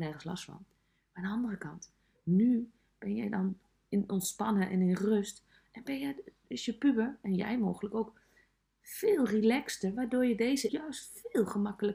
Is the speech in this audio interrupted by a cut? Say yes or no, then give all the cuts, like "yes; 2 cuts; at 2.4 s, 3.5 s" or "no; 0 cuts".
yes; 1 cut; at 10.7 s